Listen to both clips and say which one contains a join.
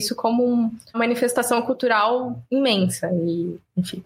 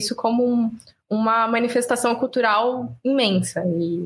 first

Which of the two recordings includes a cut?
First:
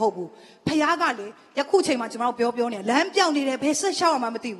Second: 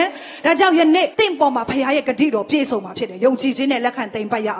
second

